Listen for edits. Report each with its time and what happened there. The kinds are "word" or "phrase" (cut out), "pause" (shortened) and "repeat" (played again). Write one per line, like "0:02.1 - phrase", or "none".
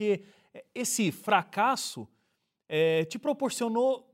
none